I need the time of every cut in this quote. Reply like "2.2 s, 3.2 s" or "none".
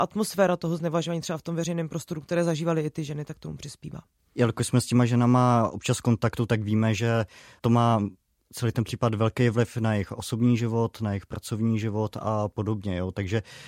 none